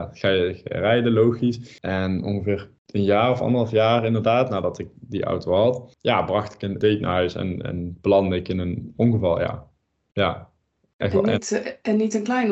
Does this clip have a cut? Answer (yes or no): no